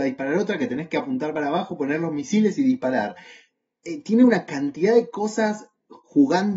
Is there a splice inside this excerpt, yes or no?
no